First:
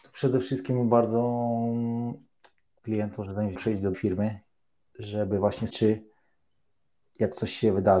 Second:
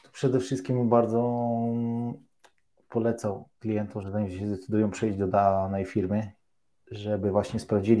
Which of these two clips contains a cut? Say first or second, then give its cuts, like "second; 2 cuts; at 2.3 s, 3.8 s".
first; 4 cuts; at 2.8 s, 3.5 s, 3.9 s, 5.7 s